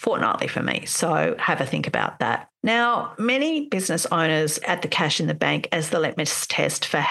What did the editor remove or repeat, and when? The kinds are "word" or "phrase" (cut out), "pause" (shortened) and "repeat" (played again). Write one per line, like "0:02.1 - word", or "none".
0:04.6 - word